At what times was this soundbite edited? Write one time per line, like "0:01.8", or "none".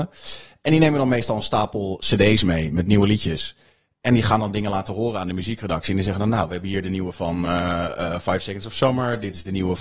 none

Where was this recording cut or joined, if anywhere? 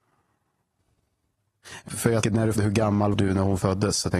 0:01.9
0:02.2
0:02.6
0:03.1

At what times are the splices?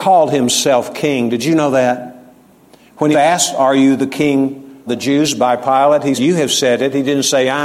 0:03.1
0:04.9
0:06.1

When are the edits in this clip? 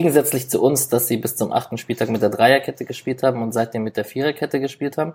none

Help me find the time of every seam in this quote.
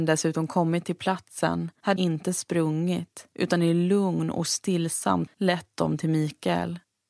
0:02.0
0:03.3
0:05.3

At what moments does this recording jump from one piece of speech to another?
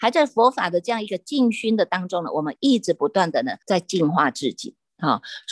0:03.6

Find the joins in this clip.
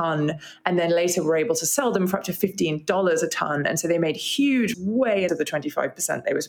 0:04.7
0:05.3

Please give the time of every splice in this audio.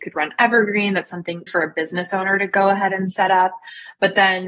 0:01.5

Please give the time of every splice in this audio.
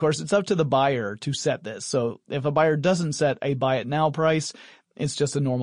none

